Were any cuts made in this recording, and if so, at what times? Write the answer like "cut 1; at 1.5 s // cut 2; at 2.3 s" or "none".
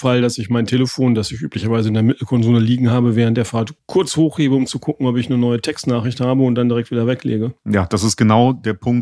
cut 1; at 3.8 s // cut 2; at 7.6 s